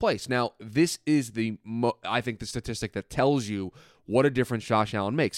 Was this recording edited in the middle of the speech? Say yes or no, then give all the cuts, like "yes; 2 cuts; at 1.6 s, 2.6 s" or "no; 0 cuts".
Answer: no; 0 cuts